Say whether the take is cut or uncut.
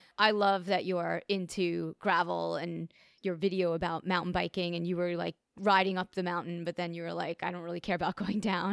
uncut